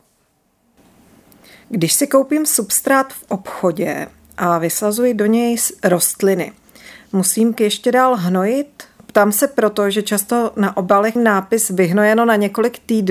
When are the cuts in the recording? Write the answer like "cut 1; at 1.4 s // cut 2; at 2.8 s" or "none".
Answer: cut 1; at 1.6 s // cut 2; at 7.6 s // cut 3; at 11.2 s